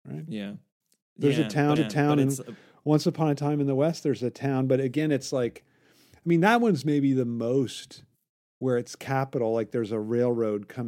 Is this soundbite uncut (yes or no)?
no